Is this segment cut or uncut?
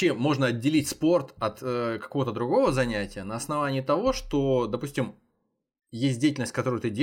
uncut